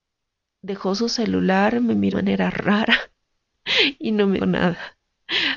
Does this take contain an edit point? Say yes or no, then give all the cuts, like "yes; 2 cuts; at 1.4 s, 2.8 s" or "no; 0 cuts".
yes; 2 cuts; at 2.1 s, 4.4 s